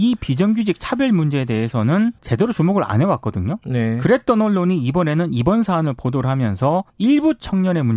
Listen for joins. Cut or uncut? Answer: cut